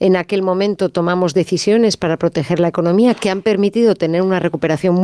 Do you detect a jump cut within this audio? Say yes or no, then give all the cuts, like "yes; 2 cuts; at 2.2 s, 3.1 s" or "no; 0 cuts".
no; 0 cuts